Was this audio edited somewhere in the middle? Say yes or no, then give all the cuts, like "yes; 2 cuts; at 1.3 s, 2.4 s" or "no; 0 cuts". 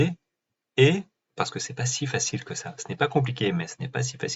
no; 0 cuts